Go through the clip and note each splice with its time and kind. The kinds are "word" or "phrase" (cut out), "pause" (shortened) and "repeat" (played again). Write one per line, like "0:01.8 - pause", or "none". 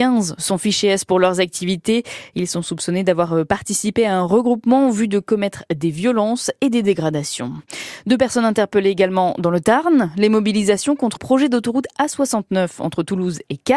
0:11.2 - word

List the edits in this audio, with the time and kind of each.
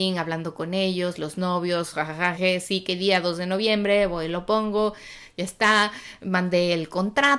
0:02.4 - word

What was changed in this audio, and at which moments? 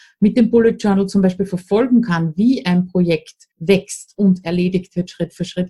0:03.5 - pause

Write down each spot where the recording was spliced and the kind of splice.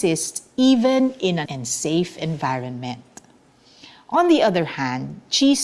0:01.4 - word

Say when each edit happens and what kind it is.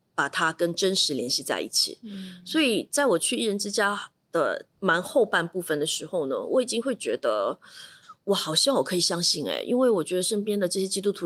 0:04.7 - pause
0:08.2 - pause

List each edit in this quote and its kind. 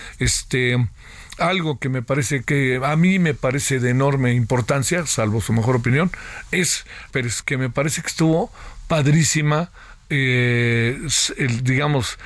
0:01.4 - word
0:02.4 - word
0:07.1 - phrase
0:07.4 - word

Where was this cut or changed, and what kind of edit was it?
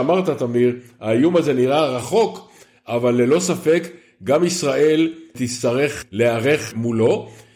none

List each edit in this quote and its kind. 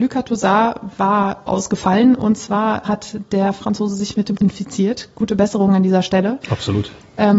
0:01.5 - word
0:02.8 - word
0:04.4 - word

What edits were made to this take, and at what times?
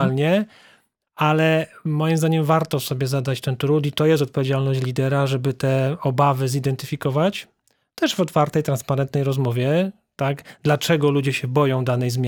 none

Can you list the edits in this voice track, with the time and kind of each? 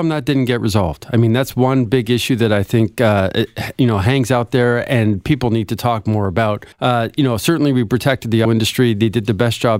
0:06.7 - pause
0:08.4 - word

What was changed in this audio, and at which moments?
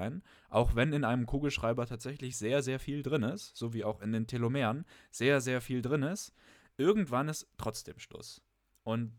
none

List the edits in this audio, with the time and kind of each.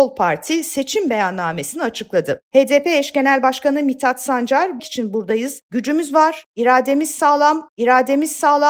0:04.8 - phrase
0:07.7 - repeat

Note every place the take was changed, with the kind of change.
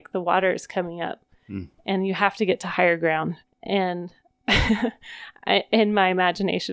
0:03.4 - pause

